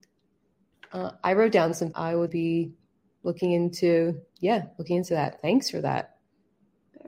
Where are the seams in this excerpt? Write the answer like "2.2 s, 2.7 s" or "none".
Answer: 1.9 s, 2.3 s, 4.3 s